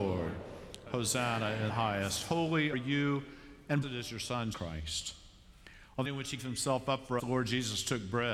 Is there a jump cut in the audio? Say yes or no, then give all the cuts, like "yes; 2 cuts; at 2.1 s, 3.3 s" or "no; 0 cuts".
yes; 7 cuts; at 1.7 s, 2.7 s, 3.8 s, 4.5 s, 6.0 s, 6.4 s, 7.2 s